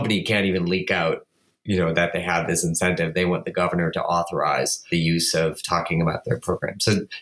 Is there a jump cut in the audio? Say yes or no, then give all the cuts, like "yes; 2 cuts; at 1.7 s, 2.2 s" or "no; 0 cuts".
no; 0 cuts